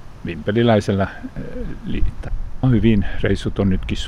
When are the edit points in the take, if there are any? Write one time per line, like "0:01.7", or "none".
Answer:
0:02.1
0:02.6